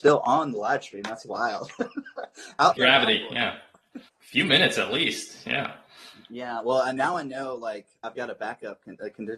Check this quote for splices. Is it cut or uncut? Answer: cut